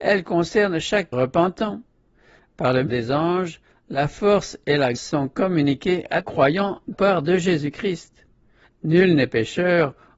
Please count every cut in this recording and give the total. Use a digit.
5